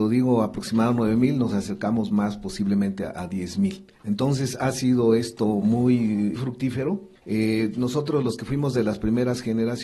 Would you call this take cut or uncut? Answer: cut